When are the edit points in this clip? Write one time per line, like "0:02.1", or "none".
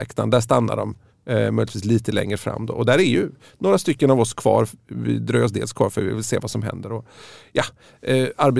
none